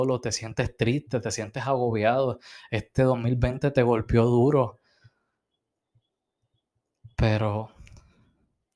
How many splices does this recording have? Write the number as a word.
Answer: one